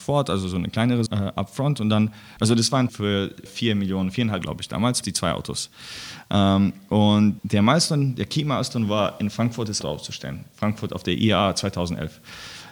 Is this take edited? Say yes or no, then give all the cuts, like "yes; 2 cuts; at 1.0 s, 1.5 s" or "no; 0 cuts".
yes; 8 cuts; at 1.1 s, 2.4 s, 2.9 s, 3.5 s, 4.4 s, 5.0 s, 7.4 s, 9.8 s